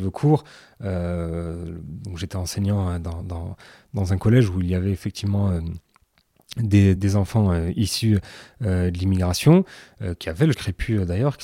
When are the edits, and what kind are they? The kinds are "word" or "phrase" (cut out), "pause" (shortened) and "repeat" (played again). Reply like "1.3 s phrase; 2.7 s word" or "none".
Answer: 3.2 s word; 7.0 s word; 10.5 s word